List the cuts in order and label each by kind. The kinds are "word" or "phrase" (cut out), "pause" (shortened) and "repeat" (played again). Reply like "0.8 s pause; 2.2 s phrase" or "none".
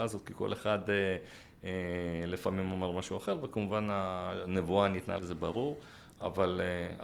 5.2 s word